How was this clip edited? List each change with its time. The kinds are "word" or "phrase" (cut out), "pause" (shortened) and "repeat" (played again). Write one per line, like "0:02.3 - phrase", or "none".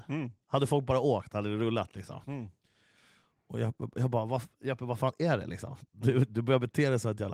none